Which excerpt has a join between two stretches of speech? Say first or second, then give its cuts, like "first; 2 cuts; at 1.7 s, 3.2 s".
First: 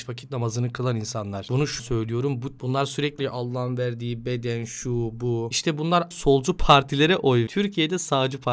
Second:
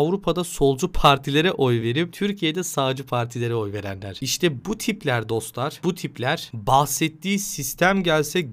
first; 5 cuts; at 1.8 s, 2.6 s, 3.2 s, 6.1 s, 7.5 s